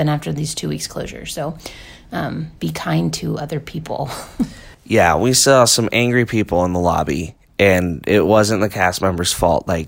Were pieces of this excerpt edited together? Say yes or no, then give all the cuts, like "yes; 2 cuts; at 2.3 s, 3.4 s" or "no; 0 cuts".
yes; 1 cut; at 2.6 s